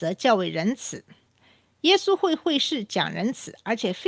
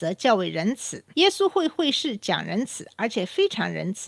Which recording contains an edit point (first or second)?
second